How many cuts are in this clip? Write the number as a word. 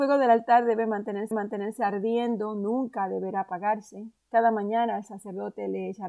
two